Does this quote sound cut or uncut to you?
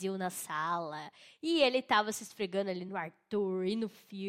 uncut